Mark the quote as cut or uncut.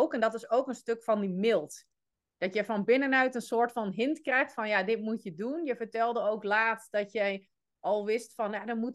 uncut